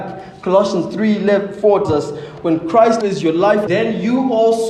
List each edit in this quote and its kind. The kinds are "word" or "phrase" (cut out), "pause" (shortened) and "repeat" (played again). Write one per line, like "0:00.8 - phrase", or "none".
0:01.8 - word
0:03.0 - word
0:03.7 - word